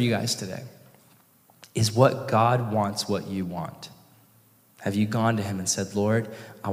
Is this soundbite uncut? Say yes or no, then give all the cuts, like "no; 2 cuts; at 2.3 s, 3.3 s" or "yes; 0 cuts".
yes; 0 cuts